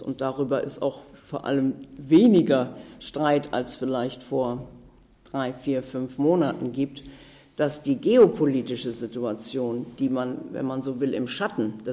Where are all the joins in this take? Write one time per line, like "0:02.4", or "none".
none